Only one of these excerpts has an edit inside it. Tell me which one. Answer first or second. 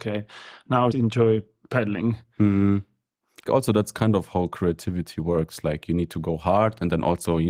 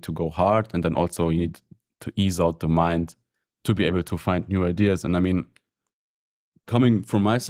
first